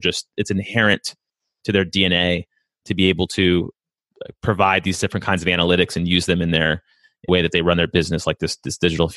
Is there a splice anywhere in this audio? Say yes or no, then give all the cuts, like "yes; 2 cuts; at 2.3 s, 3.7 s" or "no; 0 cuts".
yes; 1 cut; at 7.3 s